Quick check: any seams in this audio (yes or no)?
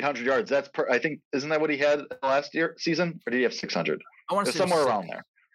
no